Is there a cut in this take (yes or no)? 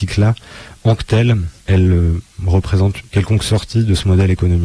yes